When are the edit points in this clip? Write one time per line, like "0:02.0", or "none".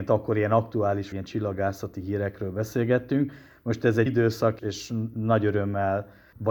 0:01.1
0:04.1
0:04.6